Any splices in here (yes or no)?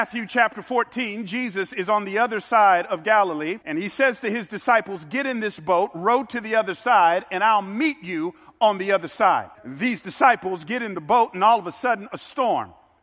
yes